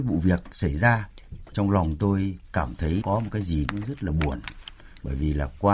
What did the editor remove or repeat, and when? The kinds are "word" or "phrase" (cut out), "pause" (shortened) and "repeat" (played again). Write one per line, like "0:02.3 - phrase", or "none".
0:01.5 - word
0:02.4 - pause
0:03.0 - word
0:03.7 - word